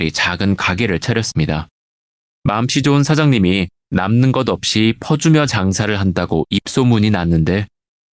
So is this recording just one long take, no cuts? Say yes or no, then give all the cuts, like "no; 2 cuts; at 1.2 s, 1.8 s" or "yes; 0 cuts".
yes; 0 cuts